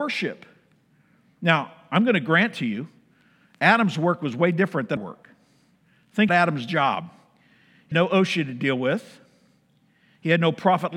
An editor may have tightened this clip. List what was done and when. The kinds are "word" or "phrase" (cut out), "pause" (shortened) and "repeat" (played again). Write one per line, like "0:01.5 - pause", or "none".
0:05.0 - word
0:06.3 - word
0:07.9 - word